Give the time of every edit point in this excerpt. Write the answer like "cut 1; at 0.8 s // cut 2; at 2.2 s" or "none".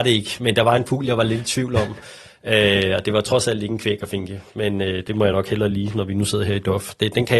none